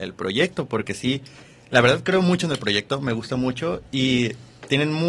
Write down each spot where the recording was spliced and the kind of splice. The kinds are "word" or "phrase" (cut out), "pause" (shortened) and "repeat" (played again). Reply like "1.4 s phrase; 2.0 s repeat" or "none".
none